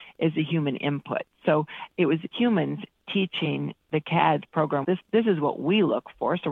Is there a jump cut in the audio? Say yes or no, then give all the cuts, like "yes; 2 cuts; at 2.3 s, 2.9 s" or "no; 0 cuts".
yes; 2 cuts; at 2.3 s, 4.8 s